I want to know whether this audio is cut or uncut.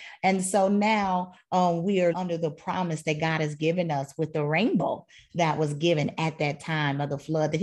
cut